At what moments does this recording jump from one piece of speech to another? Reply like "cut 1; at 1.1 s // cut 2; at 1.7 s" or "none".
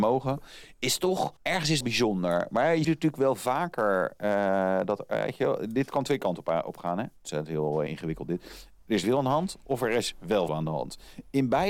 cut 1; at 1.4 s // cut 2; at 1.8 s // cut 3; at 2.8 s // cut 4; at 7.9 s // cut 5; at 9.0 s // cut 6; at 10.5 s